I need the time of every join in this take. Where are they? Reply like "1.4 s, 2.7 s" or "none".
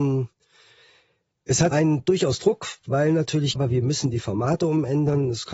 1.7 s, 2.8 s, 3.6 s